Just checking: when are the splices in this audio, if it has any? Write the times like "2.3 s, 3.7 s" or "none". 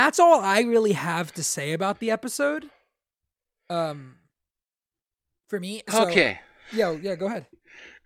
none